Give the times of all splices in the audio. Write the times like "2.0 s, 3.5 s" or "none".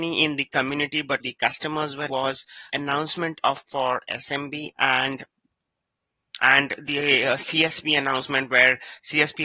1.2 s, 2.1 s, 2.7 s, 3.7 s, 4.7 s, 6.4 s